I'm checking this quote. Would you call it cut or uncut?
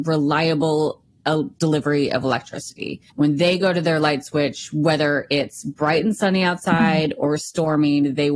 cut